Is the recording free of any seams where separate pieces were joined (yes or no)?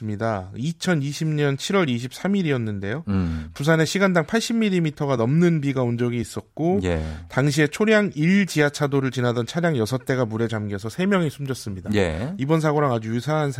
yes